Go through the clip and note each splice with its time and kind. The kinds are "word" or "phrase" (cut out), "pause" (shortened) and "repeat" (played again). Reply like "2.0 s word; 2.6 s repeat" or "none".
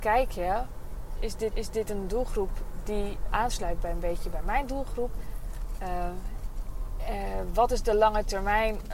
1.5 s repeat; 3.3 s word